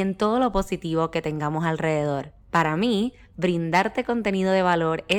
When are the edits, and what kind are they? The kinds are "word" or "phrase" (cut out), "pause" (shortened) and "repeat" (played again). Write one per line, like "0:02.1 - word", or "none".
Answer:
0:02.4 - pause